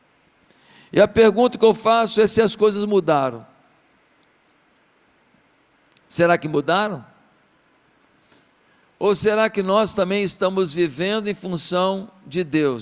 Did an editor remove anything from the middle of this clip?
no; 0 cuts

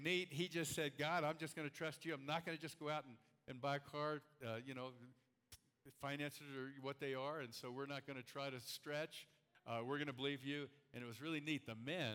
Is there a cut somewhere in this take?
no; 0 cuts

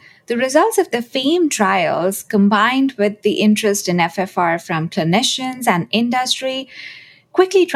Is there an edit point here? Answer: no; 0 cuts

